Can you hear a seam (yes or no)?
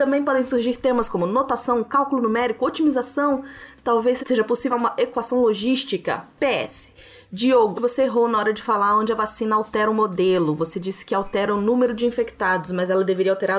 yes